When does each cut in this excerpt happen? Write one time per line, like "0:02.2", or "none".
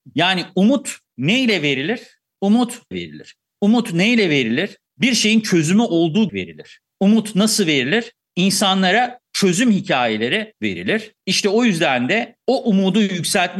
0:02.9
0:06.3
0:10.5